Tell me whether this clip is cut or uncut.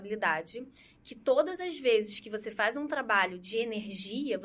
uncut